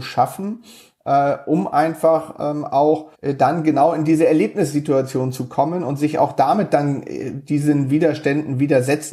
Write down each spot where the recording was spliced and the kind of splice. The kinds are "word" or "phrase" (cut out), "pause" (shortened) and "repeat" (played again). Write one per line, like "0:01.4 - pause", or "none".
0:03.1 - pause